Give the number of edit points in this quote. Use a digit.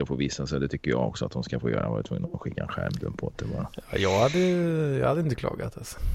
0